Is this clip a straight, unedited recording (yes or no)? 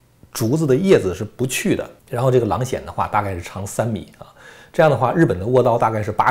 no